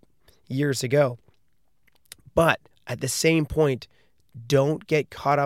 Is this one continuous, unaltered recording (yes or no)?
no